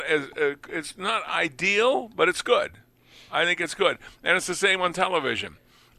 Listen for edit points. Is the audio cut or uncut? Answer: uncut